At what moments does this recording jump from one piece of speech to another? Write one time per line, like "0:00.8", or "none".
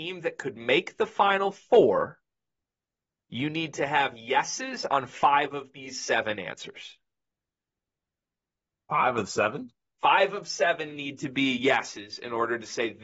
none